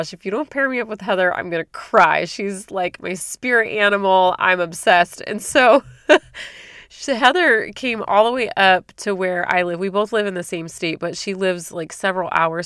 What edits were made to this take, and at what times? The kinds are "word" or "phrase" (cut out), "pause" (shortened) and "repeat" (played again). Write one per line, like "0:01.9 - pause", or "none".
none